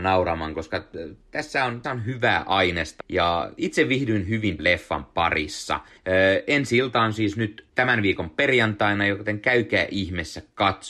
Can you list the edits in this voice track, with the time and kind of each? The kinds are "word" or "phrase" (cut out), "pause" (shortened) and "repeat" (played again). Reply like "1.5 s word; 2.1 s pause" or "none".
1.8 s word; 3.0 s word; 4.6 s word; 6.0 s pause; 7.7 s pause